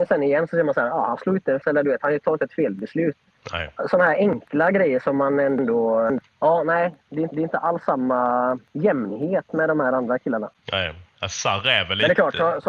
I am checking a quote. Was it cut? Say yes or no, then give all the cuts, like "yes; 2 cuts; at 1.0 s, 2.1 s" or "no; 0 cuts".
yes; 4 cuts; at 1.6 s, 6.3 s, 7.3 s, 8.7 s